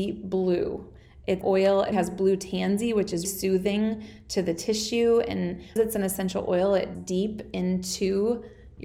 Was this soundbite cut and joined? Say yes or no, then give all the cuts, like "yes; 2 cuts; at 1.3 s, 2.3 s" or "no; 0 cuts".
yes; 5 cuts; at 1.4 s, 1.9 s, 3.2 s, 5.8 s, 6.9 s